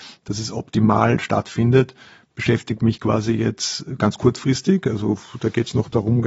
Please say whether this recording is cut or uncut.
uncut